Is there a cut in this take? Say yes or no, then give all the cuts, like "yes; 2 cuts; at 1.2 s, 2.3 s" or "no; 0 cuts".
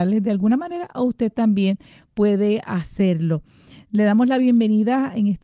no; 0 cuts